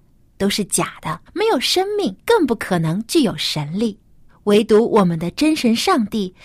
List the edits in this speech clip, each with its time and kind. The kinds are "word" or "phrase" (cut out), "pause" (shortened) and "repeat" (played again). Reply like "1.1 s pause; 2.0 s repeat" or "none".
1.3 s pause; 2.2 s pause; 4.3 s pause